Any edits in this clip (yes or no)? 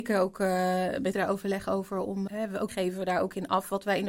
yes